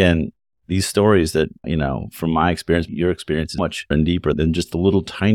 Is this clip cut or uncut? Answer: cut